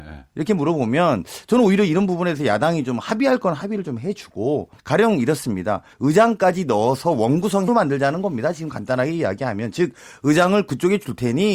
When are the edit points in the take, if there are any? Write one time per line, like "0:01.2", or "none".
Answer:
0:04.8
0:05.9
0:07.7